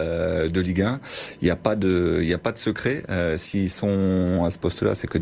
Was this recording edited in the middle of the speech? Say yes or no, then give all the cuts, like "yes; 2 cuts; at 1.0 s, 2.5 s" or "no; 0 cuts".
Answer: no; 0 cuts